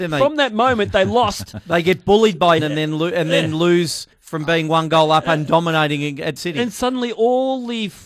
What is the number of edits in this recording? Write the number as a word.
three